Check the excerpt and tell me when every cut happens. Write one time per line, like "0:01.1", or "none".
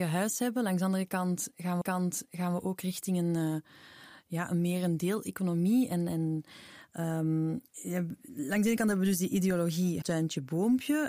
0:01.8
0:10.0